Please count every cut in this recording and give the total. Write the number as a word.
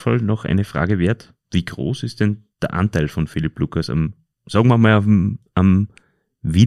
three